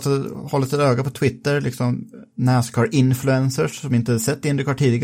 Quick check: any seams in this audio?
no; 0 cuts

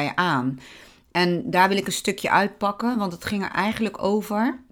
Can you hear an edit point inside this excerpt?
no; 0 cuts

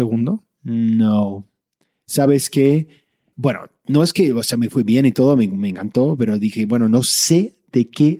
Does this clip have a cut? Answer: no; 0 cuts

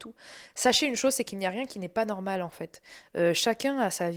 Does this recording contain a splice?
no; 0 cuts

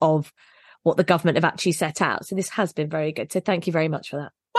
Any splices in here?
no; 0 cuts

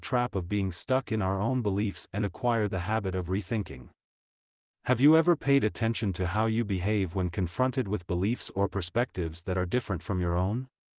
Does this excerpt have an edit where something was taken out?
no; 0 cuts

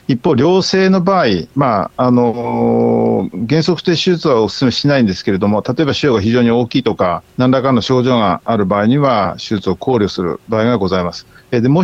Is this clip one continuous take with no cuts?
no; 1 cut; at 7.3 s

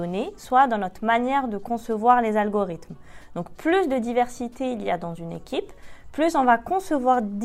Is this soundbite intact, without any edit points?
yes; 0 cuts

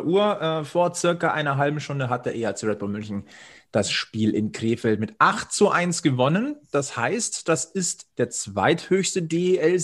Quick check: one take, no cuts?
yes; 0 cuts

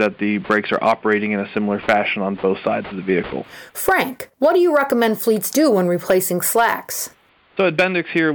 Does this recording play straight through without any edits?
yes; 0 cuts

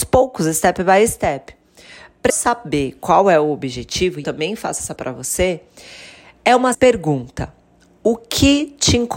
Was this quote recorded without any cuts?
no; 4 cuts; at 2.3 s, 4.2 s, 5.0 s, 6.7 s

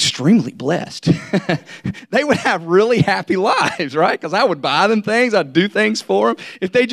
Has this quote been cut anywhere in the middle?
no; 0 cuts

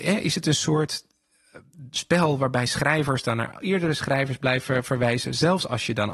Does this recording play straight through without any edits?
yes; 0 cuts

